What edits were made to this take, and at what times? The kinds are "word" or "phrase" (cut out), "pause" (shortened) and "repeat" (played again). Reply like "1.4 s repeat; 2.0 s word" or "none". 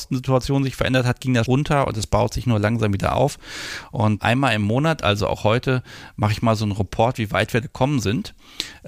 1.5 s word; 4.2 s word; 7.6 s word